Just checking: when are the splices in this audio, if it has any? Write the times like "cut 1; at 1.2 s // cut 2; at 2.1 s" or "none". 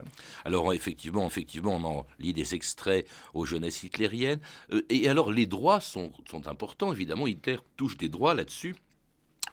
cut 1; at 1.3 s // cut 2; at 7.7 s

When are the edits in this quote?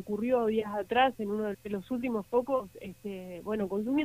cut 1; at 1.5 s

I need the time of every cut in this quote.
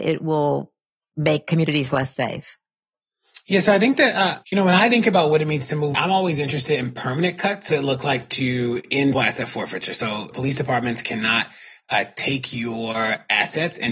cut 1; at 4.4 s // cut 2; at 5.9 s // cut 3; at 7.7 s // cut 4; at 9.1 s // cut 5; at 10.3 s

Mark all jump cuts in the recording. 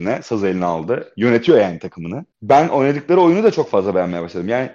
cut 1; at 2.3 s

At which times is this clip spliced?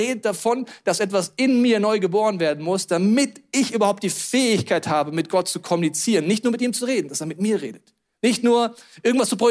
cut 1; at 8.1 s

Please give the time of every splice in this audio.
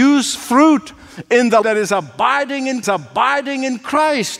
cut 1; at 1.6 s // cut 2; at 2.8 s

